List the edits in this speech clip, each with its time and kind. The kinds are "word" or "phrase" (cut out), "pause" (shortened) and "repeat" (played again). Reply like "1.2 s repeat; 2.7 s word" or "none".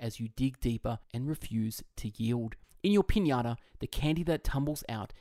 1.0 s pause; 2.6 s pause